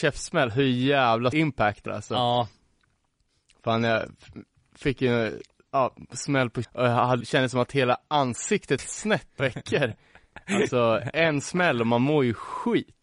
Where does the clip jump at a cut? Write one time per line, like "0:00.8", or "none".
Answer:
0:01.3
0:01.9
0:06.6
0:07.2
0:08.8
0:09.4